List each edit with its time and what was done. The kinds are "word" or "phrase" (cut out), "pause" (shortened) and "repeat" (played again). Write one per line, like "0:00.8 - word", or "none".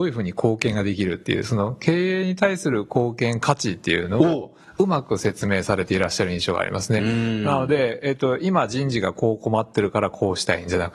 none